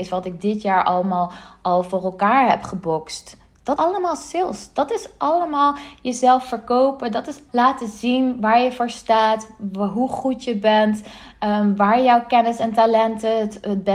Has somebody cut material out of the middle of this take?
yes; 2 cuts; at 3.8 s, 7.5 s

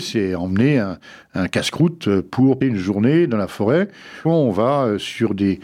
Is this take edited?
yes; 2 cuts; at 2.6 s, 4.2 s

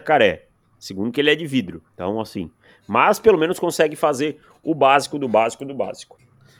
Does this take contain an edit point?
yes; 1 cut; at 1.9 s

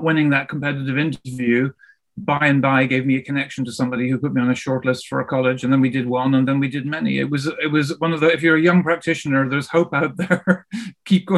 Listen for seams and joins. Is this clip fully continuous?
yes; 0 cuts

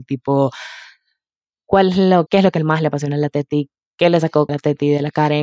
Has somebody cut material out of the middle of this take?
yes; 2 cuts; at 2.3 s, 4.5 s

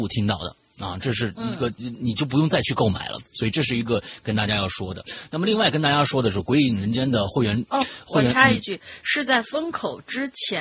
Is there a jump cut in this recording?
no; 0 cuts

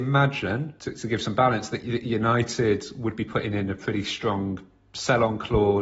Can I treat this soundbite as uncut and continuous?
yes; 0 cuts

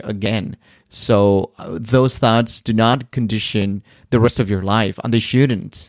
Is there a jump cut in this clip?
no; 0 cuts

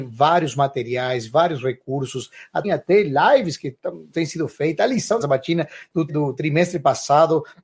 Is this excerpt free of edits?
no; 4 cuts; at 2.6 s, 4.1 s, 5.2 s, 6.1 s

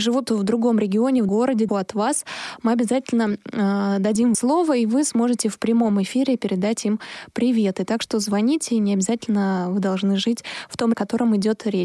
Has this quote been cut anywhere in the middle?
yes; 4 cuts; at 1.3 s, 1.7 s, 4.3 s, 10.9 s

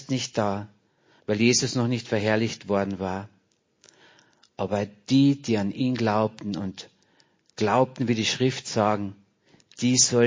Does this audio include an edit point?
no; 0 cuts

